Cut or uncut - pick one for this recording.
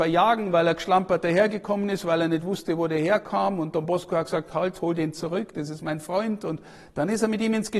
uncut